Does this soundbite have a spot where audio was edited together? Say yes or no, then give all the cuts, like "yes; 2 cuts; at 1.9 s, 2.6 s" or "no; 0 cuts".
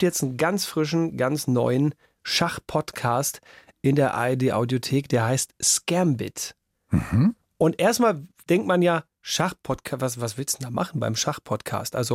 no; 0 cuts